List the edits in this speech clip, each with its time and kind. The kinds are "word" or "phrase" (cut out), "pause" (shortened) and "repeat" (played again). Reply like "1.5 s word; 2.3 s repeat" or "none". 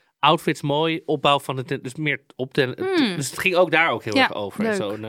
none